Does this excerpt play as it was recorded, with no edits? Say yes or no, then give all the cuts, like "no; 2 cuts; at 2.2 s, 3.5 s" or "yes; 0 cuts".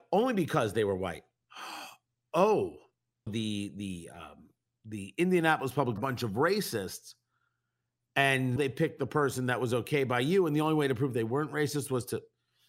no; 4 cuts; at 3.3 s, 4.7 s, 6.0 s, 8.6 s